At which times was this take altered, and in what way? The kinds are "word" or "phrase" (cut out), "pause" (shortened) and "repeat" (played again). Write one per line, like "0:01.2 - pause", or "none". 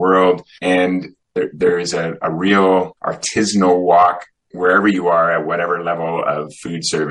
0:03.0 - pause